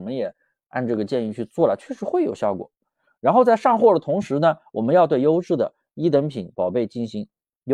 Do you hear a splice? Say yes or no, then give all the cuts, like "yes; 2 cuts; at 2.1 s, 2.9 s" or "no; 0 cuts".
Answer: no; 0 cuts